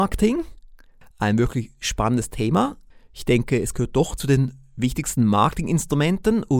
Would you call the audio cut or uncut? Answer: cut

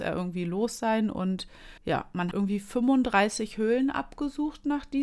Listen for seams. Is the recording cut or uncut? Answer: cut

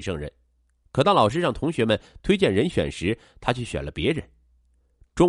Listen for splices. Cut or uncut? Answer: uncut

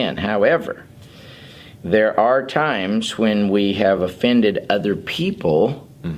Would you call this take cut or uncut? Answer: uncut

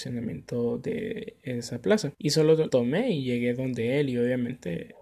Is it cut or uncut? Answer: cut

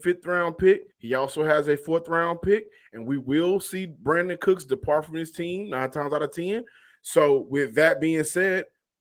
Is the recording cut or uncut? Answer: cut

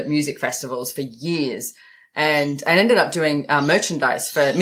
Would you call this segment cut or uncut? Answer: uncut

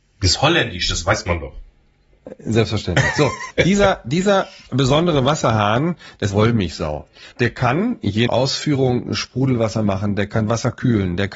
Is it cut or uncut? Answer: cut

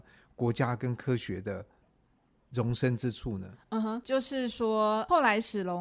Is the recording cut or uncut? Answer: uncut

